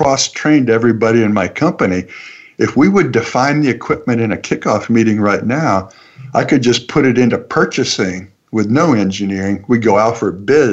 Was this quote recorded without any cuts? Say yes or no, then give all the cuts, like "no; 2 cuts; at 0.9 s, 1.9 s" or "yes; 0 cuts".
yes; 0 cuts